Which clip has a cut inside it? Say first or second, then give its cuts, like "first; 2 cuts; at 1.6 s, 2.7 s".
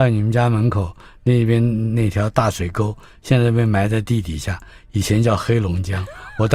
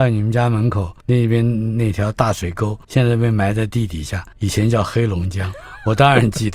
second; 3 cuts; at 1.0 s, 2.8 s, 4.3 s